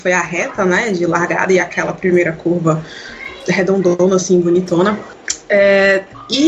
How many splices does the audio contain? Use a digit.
0